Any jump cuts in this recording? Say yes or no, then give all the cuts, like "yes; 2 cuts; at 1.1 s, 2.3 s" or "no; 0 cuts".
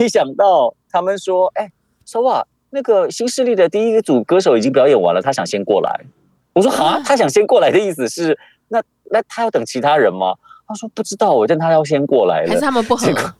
no; 0 cuts